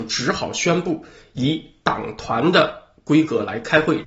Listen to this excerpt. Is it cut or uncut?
uncut